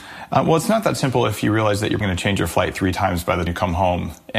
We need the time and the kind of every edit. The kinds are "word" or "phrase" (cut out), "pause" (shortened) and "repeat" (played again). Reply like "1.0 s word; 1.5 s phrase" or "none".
2.0 s word; 3.5 s word